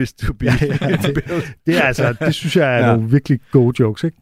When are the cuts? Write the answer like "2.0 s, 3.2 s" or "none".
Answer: none